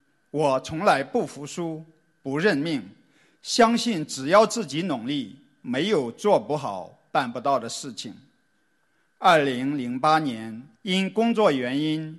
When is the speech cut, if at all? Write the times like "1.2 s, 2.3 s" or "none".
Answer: 10.8 s

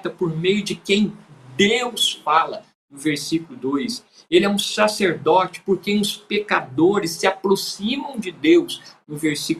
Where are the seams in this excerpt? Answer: none

